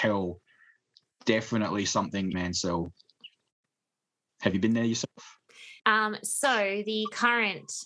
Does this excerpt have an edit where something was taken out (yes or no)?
yes